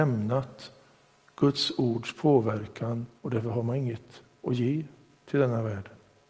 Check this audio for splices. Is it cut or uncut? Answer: cut